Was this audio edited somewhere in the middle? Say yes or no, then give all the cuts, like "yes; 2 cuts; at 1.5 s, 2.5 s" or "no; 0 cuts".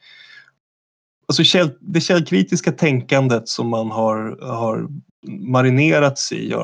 yes; 1 cut; at 5.1 s